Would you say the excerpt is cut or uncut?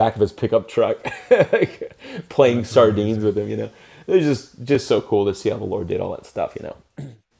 uncut